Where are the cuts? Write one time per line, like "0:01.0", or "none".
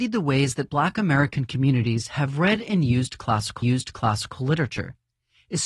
0:03.6